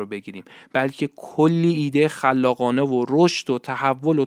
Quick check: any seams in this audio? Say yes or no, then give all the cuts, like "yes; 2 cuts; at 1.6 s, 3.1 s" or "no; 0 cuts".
no; 0 cuts